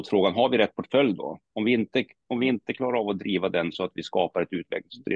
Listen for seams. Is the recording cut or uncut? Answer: uncut